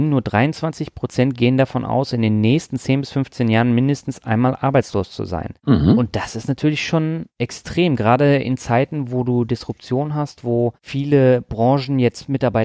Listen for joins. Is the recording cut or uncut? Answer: uncut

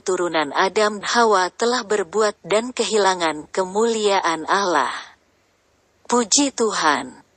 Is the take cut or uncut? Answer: cut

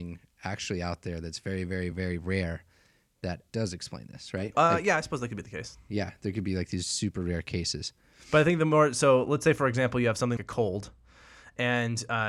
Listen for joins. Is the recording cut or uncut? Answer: cut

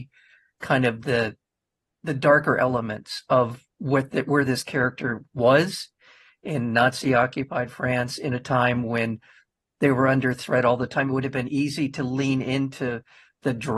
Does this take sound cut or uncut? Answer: uncut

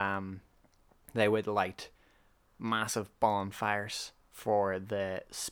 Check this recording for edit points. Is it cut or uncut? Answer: uncut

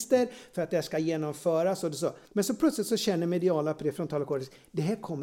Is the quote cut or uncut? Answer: cut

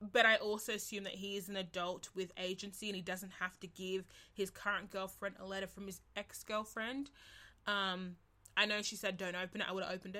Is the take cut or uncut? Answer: uncut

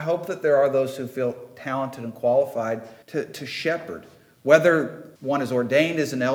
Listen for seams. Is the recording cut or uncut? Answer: cut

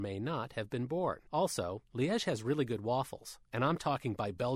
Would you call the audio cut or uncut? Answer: cut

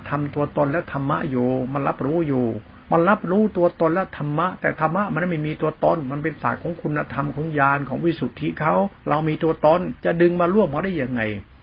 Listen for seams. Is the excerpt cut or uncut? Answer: cut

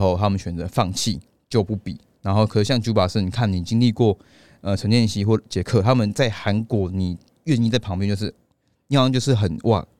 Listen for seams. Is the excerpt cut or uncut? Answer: uncut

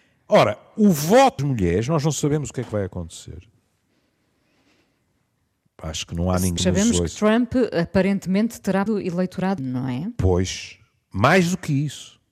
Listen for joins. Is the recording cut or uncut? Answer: cut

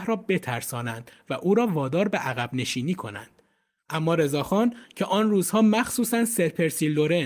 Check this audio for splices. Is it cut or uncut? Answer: uncut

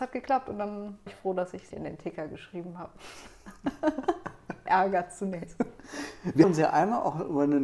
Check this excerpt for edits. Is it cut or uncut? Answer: cut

